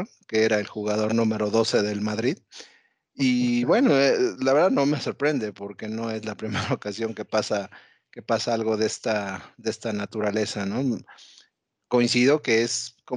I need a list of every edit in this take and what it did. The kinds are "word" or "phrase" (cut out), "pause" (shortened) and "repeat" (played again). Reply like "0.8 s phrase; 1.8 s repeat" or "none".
none